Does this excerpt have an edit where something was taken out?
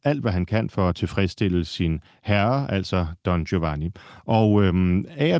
no; 0 cuts

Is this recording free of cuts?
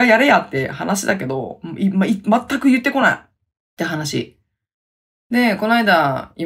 yes; 0 cuts

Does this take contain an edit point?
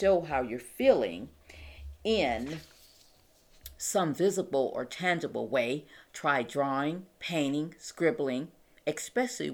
no; 0 cuts

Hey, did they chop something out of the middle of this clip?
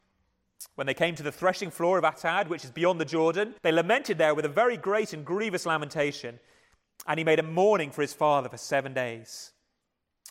yes; 1 cut; at 3.6 s

